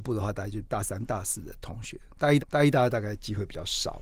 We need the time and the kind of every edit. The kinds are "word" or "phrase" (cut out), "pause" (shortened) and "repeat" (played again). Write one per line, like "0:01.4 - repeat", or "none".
0:02.4 - repeat